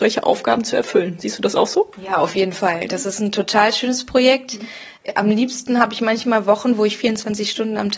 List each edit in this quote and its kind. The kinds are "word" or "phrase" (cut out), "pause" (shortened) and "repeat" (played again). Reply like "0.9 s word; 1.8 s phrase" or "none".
none